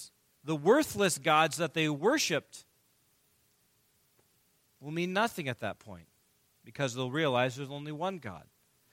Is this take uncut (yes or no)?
yes